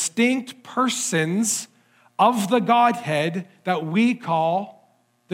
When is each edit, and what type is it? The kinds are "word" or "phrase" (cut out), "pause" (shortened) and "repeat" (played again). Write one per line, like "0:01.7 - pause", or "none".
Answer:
none